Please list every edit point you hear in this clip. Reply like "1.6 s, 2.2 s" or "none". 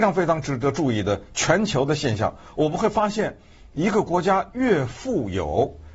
none